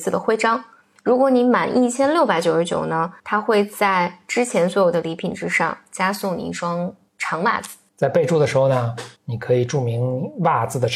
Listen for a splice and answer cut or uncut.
cut